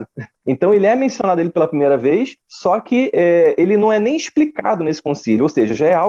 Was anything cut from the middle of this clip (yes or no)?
yes